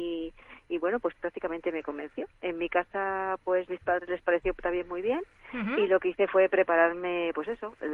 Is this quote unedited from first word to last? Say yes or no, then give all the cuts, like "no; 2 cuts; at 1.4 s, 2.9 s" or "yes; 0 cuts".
yes; 0 cuts